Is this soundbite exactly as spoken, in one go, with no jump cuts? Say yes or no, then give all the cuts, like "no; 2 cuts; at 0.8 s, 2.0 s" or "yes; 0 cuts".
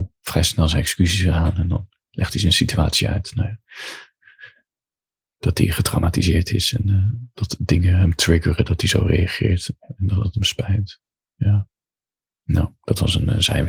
yes; 0 cuts